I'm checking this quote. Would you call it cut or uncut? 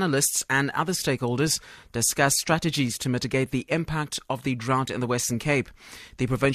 uncut